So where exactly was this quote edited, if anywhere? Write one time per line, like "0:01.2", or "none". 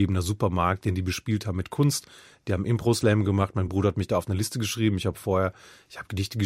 none